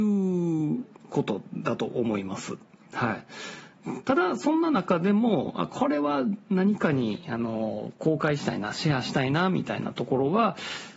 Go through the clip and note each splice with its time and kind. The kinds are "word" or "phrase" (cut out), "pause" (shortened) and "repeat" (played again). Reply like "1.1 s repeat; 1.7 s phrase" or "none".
none